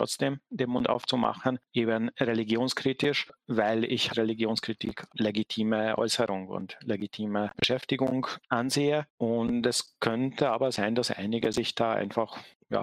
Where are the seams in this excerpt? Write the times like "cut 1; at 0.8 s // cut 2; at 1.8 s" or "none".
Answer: cut 1; at 4.1 s // cut 2; at 5.1 s